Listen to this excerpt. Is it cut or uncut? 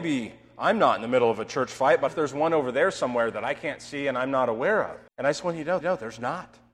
cut